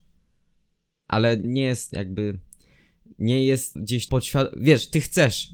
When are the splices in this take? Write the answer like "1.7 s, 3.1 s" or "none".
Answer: 1.4 s, 1.9 s, 3.7 s, 4.1 s